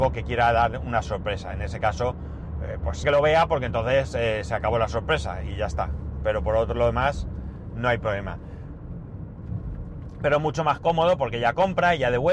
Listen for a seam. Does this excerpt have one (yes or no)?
yes